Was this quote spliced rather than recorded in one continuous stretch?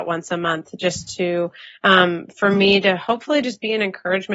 no; 0 cuts

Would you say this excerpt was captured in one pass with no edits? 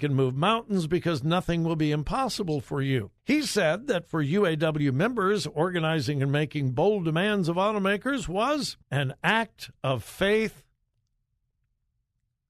no; 2 cuts; at 3.2 s, 8.8 s

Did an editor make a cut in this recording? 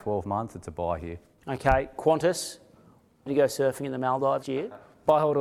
yes; 2 cuts; at 3.3 s, 4.4 s

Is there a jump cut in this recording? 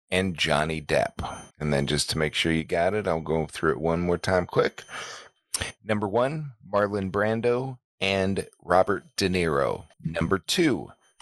yes; 2 cuts; at 1.5 s, 9.9 s

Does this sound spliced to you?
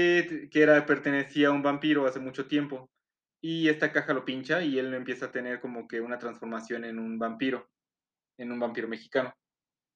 no; 0 cuts

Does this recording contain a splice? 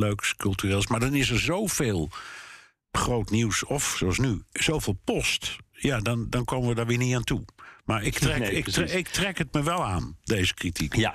no; 0 cuts

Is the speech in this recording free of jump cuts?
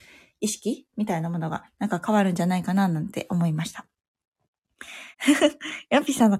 no; 1 cut; at 5.1 s

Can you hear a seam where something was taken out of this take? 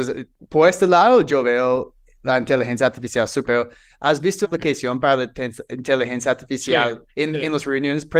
yes; 3 cuts; at 3.4 s, 4.4 s, 7.1 s

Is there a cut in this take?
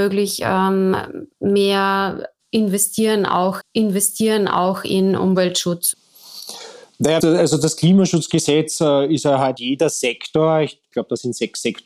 yes; 4 cuts; at 1.3 s, 3.6 s, 7.2 s, 9.6 s

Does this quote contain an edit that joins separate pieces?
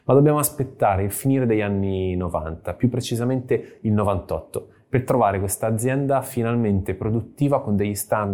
no; 0 cuts

